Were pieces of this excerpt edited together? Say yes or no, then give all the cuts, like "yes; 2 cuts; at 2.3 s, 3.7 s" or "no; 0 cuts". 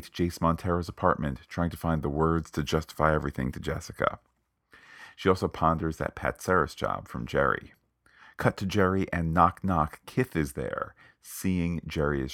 no; 0 cuts